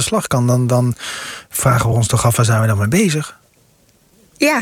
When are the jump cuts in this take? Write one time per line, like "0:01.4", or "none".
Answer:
none